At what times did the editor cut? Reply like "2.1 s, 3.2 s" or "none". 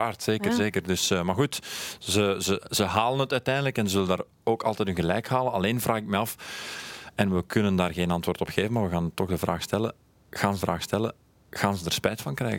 10.6 s